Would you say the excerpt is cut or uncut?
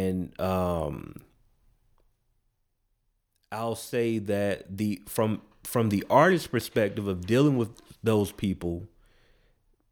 uncut